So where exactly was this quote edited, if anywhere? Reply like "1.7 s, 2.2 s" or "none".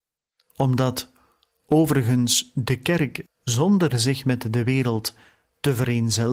3.3 s